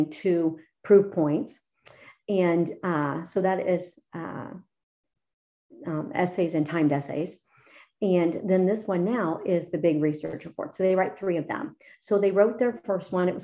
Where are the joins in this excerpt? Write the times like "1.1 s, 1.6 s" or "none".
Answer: none